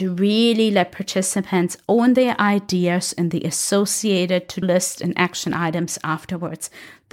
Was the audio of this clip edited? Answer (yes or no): yes